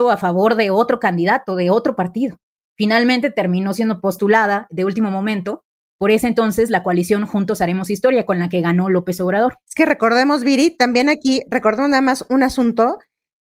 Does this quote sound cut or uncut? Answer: uncut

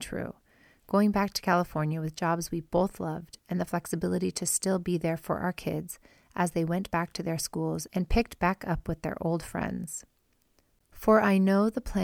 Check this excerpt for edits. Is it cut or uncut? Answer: uncut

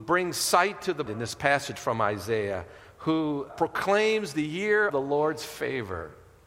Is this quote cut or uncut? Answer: cut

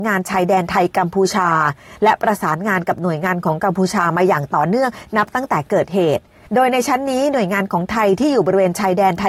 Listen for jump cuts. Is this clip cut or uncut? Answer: uncut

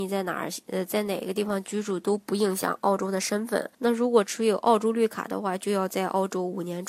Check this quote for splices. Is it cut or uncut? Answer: cut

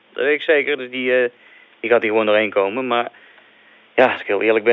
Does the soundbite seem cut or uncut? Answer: uncut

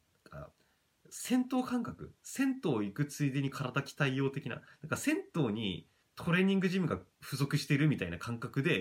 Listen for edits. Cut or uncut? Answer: cut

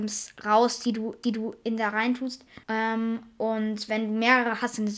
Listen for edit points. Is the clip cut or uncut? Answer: cut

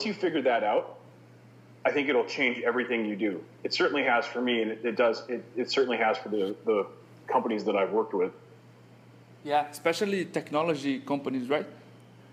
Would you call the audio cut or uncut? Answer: uncut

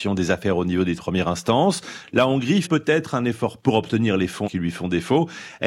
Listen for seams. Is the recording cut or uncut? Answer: cut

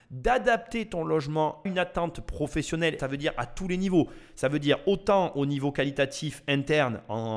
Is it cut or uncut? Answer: cut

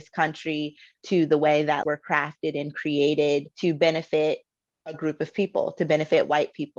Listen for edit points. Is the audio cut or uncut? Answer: cut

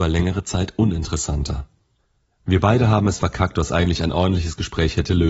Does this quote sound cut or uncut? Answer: uncut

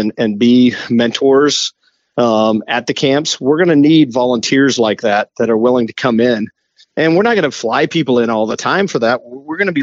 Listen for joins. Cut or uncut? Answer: uncut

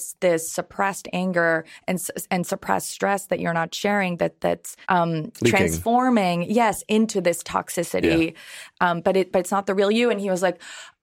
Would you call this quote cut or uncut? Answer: cut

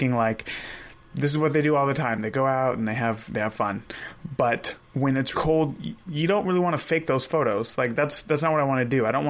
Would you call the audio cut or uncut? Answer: cut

